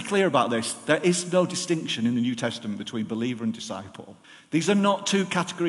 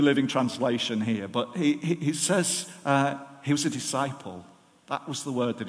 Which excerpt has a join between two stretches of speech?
first; 1 cut; at 4.2 s

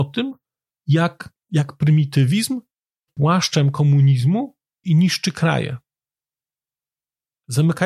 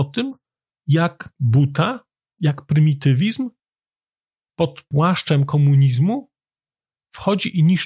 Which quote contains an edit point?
first; 3 cuts; at 1.3 s, 3.1 s, 4.8 s

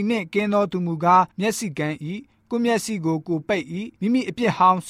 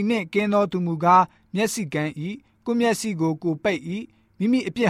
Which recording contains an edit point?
first; 2 cuts; at 1.3 s, 4.0 s

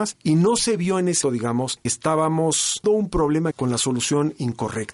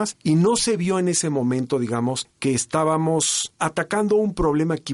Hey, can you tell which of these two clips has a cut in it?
first; 4 cuts; at 1.2 s, 1.9 s, 2.8 s, 3.5 s

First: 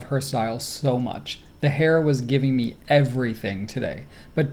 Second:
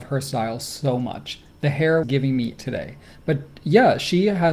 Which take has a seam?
second; 2 cuts; at 2.0 s, 2.6 s

